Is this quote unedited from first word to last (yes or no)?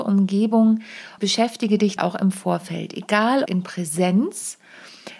no